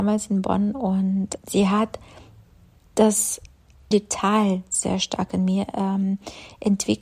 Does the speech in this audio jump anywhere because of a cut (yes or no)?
yes